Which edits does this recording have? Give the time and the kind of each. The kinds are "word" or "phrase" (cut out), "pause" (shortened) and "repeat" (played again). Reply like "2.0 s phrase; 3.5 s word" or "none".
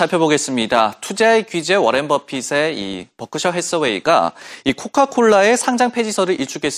none